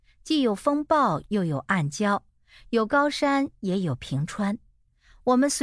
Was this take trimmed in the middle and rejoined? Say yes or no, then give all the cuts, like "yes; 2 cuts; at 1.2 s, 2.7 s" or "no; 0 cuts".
no; 0 cuts